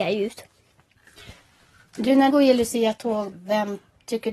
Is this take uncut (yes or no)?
no